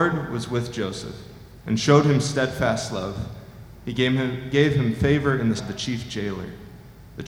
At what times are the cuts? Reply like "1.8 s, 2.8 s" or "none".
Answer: 5.6 s